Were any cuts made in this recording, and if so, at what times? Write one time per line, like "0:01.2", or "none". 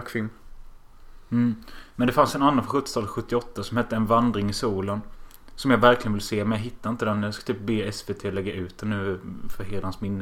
none